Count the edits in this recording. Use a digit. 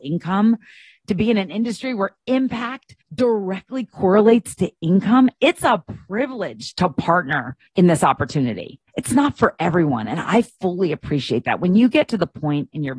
3